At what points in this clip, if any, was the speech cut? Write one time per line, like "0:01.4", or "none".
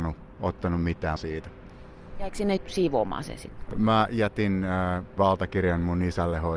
0:01.2
0:02.6
0:05.2